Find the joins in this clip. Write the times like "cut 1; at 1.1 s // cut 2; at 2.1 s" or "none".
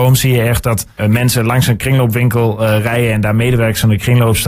cut 1; at 1.0 s